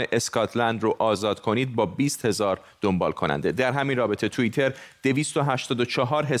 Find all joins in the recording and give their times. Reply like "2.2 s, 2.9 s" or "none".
none

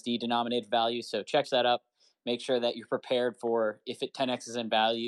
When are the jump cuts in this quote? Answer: 1.4 s

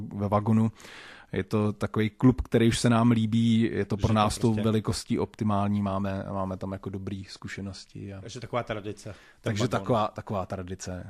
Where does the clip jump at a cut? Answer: none

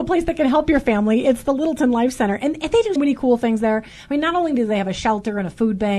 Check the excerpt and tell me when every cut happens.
3.0 s

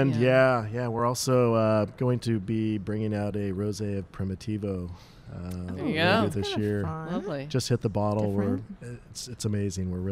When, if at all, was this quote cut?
none

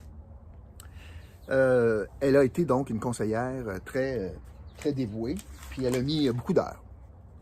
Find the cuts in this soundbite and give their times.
none

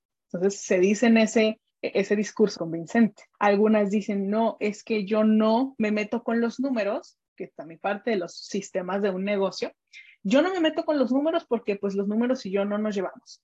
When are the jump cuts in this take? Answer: 1.7 s, 2.6 s, 3.3 s

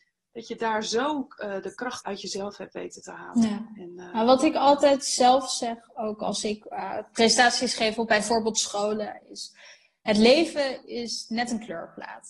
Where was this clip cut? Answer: 2.0 s

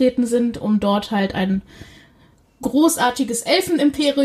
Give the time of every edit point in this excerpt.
none

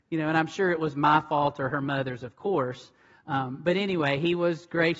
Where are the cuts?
none

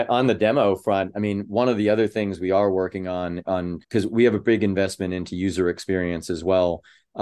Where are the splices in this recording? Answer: 3.4 s, 3.8 s

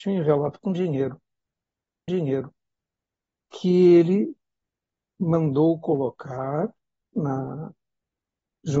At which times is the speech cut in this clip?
2.1 s

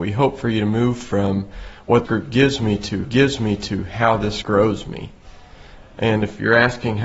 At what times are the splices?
2.1 s, 3.0 s, 4.4 s

